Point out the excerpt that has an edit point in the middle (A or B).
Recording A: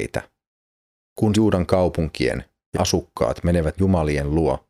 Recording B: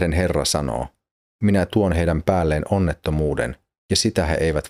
A